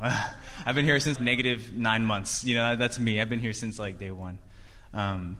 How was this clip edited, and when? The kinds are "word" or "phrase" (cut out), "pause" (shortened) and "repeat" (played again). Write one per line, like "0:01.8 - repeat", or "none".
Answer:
0:01.2 - word